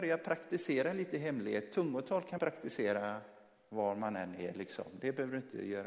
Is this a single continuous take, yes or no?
no